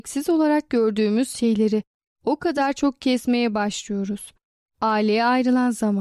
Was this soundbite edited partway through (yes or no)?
no